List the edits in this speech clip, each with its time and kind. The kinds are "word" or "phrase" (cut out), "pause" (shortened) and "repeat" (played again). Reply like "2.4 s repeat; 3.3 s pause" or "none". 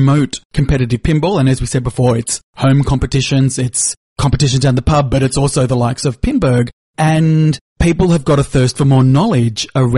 none